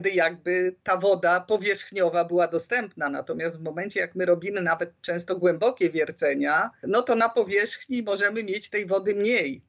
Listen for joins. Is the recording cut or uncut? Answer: uncut